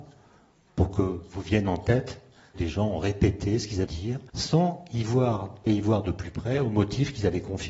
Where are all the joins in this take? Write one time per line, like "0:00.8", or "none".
0:02.5
0:03.9
0:04.3
0:05.7